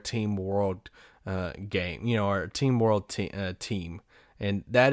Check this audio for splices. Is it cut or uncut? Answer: uncut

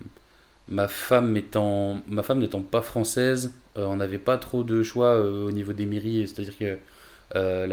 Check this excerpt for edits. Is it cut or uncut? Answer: uncut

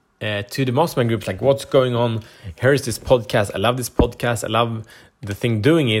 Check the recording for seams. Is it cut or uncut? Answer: uncut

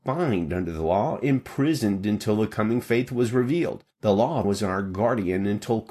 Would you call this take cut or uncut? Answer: cut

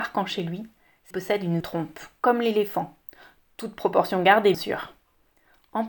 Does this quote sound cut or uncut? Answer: cut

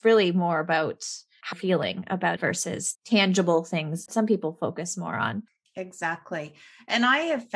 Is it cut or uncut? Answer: cut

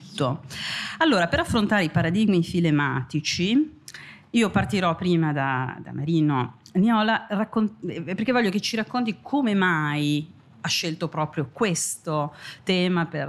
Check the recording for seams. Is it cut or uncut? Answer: uncut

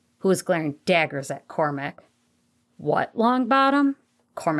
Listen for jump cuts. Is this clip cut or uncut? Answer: uncut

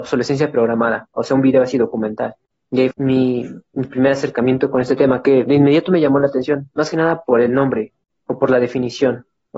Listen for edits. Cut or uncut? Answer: cut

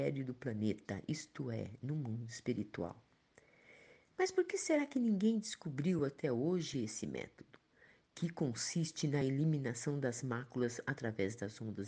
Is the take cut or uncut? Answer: uncut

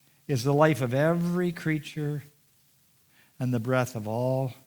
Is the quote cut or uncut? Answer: uncut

